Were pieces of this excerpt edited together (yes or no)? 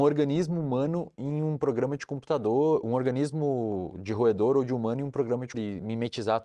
yes